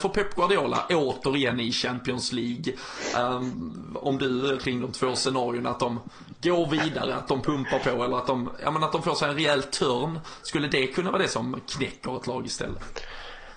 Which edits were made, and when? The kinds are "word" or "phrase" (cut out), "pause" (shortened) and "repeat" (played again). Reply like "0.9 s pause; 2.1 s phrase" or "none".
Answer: 4.6 s word

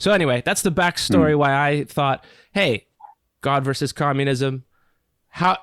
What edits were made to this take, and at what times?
none

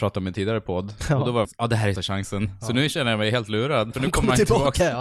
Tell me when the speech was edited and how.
1.4 s word; 2.0 s word; 3.9 s word

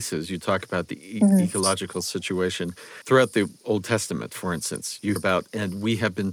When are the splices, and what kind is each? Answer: 5.2 s word

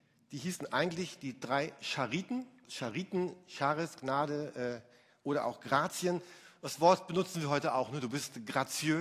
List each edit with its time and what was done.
2.6 s word

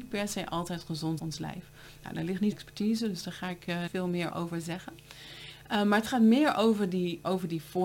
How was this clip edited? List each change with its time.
1.2 s phrase; 2.5 s phrase; 3.9 s word; 4.3 s word

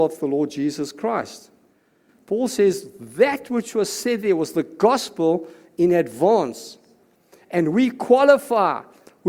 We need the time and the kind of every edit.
none

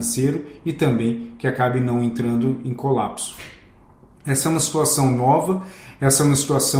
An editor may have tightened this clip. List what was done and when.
none

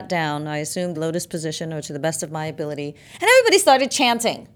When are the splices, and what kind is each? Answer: 0.9 s word

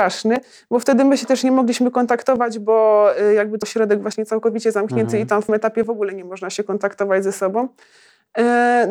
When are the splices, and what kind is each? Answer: 3.6 s word; 5.5 s word

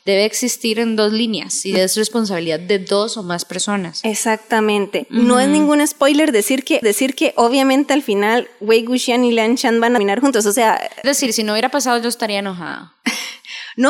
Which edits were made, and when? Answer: 6.8 s repeat; 11.0 s word

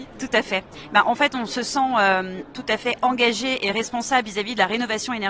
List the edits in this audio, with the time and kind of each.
none

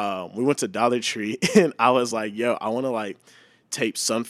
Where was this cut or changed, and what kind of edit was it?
none

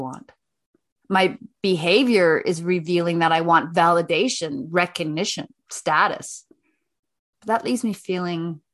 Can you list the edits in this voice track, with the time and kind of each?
none

